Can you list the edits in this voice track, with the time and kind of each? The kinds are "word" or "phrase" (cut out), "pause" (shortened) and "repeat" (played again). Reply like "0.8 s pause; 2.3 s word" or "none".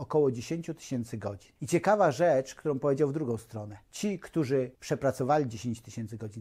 1.6 s pause; 3.9 s pause; 4.7 s pause